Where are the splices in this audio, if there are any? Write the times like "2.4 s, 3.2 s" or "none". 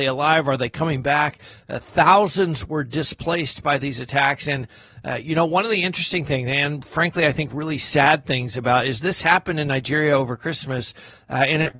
none

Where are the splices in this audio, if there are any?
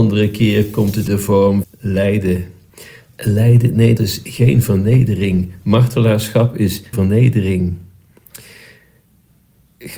1.1 s, 1.6 s, 4.0 s, 6.9 s

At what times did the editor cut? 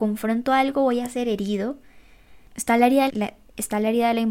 2.5 s, 3.1 s

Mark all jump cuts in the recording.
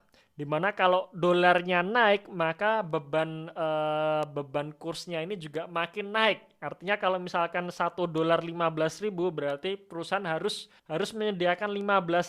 10.8 s

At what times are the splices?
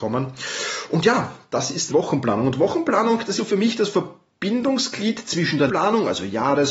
1.9 s, 3.4 s, 5.7 s

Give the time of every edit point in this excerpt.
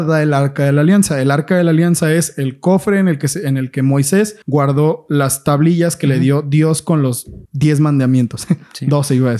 4.4 s, 7.5 s

